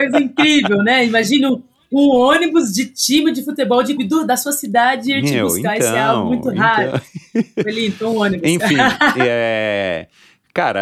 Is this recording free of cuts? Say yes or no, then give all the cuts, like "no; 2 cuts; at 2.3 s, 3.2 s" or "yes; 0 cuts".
no; 1 cut; at 4.0 s